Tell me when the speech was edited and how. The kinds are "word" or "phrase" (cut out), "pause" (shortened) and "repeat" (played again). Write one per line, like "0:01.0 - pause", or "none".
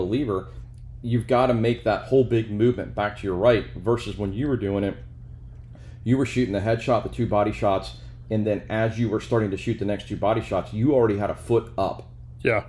none